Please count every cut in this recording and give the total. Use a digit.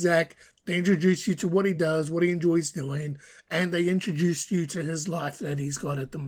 0